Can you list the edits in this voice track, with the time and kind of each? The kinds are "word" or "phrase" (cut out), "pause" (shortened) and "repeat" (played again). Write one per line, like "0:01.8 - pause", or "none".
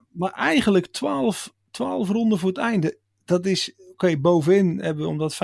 none